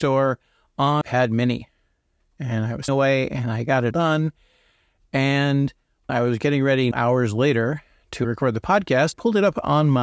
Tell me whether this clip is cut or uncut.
cut